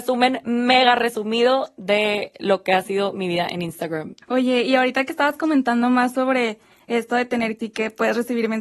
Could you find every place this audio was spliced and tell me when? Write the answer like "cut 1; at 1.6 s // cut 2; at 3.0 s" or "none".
cut 1; at 4.2 s // cut 2; at 7.6 s